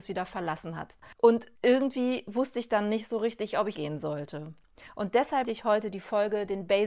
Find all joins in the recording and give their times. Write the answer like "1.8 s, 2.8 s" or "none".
3.7 s, 5.4 s